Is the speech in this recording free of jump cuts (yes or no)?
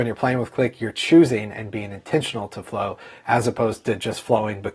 yes